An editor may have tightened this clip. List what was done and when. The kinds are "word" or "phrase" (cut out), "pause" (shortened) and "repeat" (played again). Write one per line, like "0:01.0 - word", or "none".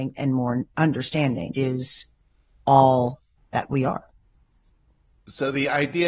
0:01.5 - word
0:03.4 - pause